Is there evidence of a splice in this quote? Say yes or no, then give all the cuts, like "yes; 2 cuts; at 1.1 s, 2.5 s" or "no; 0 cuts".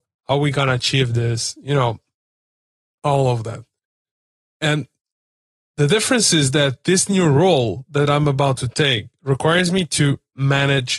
no; 0 cuts